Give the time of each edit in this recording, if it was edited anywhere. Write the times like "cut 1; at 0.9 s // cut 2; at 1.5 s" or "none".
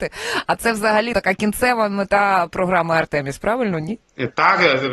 cut 1; at 1.1 s